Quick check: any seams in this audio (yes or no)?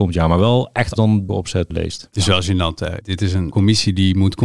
yes